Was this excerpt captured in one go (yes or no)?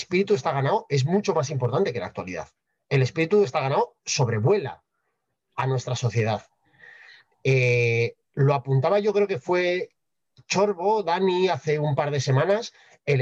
yes